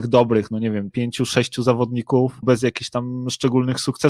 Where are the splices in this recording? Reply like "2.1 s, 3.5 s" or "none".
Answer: 0.9 s, 2.4 s